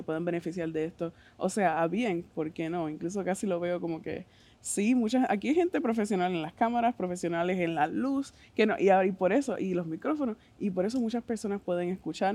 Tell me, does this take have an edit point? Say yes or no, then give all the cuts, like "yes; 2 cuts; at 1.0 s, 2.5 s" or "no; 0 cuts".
yes; 1 cut; at 2.3 s